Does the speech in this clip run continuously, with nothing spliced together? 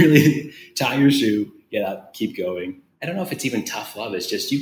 yes; 0 cuts

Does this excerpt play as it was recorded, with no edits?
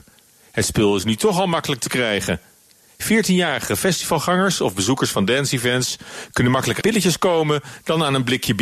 no; 1 cut; at 6.8 s

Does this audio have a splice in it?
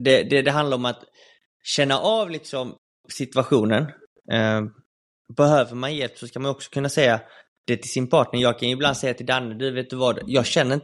no; 0 cuts

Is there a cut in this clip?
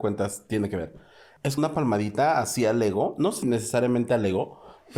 yes; 2 cuts; at 1.6 s, 3.4 s

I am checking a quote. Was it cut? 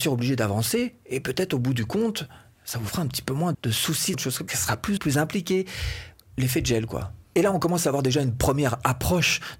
yes; 4 cuts; at 3.5 s, 4.1 s, 4.5 s, 5.0 s

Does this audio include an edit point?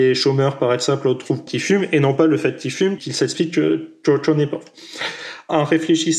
yes; 2 cuts; at 1.5 s, 3.0 s

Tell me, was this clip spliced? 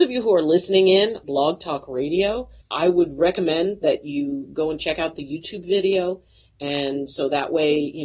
yes; 2 cuts; at 1.2 s, 2.6 s

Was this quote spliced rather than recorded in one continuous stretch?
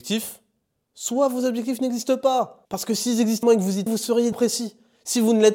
yes; 4 cuts; at 2.7 s, 3.4 s, 3.9 s, 4.3 s

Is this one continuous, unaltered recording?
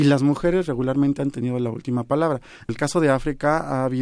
no; 1 cut; at 2.7 s

